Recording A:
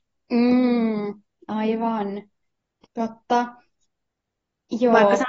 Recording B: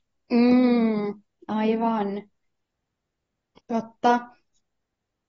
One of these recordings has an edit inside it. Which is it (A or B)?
A